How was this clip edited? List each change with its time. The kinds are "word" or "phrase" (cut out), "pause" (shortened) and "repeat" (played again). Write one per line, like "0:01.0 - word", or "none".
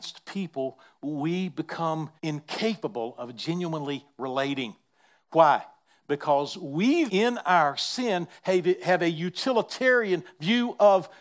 0:02.2 - pause
0:07.1 - word